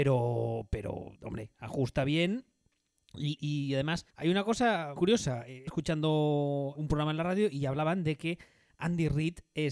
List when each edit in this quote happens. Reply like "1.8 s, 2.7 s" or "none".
1.2 s, 3.4 s, 4.1 s, 5.0 s, 5.7 s, 6.7 s